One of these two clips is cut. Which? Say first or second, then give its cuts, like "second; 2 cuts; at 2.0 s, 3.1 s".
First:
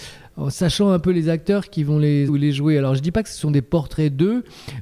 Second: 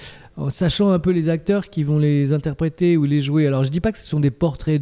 first; 1 cut; at 2.3 s